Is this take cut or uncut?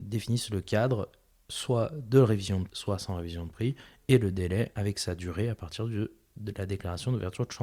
cut